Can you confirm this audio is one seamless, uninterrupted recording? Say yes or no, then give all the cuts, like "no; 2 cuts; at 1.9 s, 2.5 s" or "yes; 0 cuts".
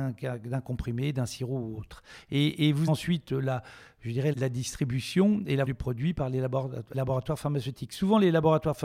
no; 4 cuts; at 2.9 s, 4.3 s, 5.7 s, 6.9 s